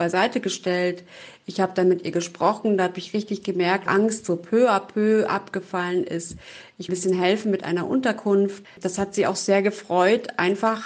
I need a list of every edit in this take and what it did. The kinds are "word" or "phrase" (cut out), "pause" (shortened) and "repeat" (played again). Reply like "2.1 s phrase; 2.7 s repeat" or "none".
3.9 s phrase; 6.9 s phrase; 8.6 s word